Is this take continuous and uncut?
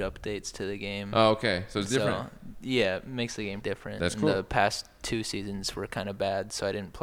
no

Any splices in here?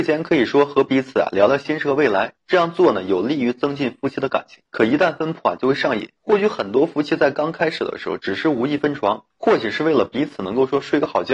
yes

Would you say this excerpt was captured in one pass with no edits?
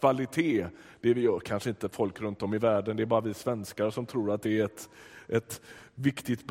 yes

